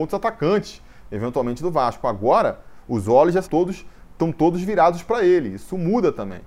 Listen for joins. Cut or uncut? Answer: cut